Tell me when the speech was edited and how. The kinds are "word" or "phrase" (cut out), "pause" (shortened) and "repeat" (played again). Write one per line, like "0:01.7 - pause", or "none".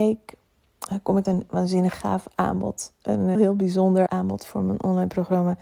0:01.2 - word
0:03.3 - word
0:04.1 - word